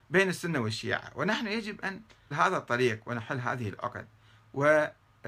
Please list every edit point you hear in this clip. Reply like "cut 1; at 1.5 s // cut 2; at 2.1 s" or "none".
cut 1; at 2.3 s

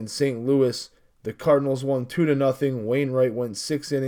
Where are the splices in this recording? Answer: cut 1; at 1.0 s

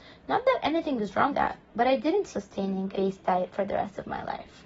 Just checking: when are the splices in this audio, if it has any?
cut 1; at 1.3 s // cut 2; at 2.3 s // cut 3; at 2.9 s

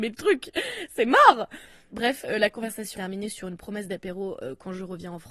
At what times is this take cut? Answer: cut 1; at 2.9 s

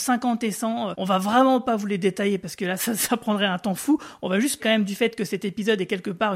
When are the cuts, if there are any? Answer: cut 1; at 0.9 s // cut 2; at 2.8 s // cut 3; at 4.6 s

